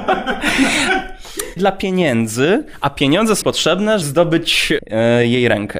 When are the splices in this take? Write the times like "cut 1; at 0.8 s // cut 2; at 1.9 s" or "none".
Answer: cut 1; at 1.6 s // cut 2; at 3.4 s // cut 3; at 4.0 s // cut 4; at 4.8 s